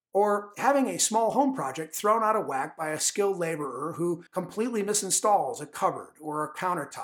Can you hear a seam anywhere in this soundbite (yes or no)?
yes